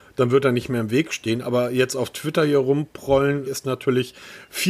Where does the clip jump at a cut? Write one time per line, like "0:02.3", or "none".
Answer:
0:03.5